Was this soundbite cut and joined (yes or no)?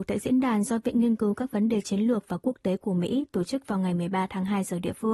no